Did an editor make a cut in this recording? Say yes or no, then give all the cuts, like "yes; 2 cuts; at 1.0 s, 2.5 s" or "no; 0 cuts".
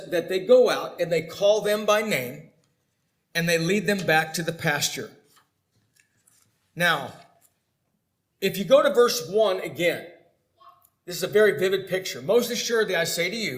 no; 0 cuts